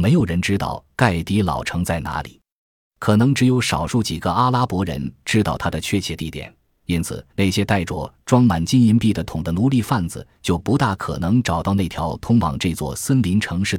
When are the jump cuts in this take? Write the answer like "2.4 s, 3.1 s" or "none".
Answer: 7.3 s